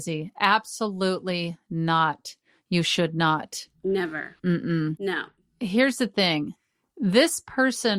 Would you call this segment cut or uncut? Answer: uncut